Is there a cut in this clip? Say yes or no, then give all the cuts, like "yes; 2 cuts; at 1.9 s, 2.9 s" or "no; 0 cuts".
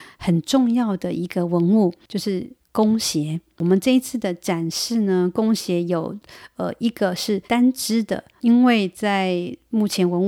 yes; 1 cut; at 7.5 s